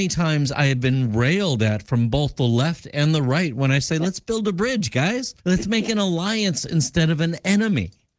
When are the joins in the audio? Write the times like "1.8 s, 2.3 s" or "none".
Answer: 5.4 s